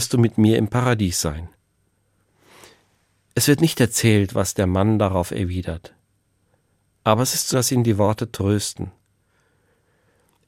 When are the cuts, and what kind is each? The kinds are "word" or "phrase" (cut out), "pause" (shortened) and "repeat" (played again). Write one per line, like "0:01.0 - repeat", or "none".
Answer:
0:07.5 - word